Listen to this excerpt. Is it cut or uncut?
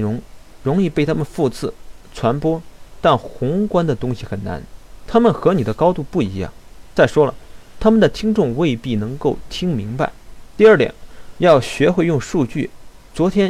uncut